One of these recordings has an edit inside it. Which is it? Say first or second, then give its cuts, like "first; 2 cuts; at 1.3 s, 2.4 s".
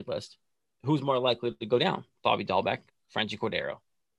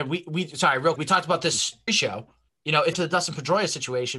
second; 4 cuts; at 1.0 s, 1.9 s, 2.5 s, 2.9 s